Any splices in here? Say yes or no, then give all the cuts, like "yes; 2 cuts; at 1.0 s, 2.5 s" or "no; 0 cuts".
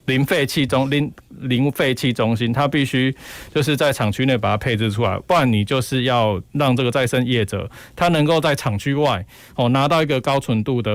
no; 0 cuts